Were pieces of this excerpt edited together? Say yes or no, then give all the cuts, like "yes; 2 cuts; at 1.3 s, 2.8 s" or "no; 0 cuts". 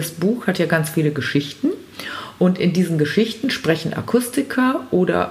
no; 0 cuts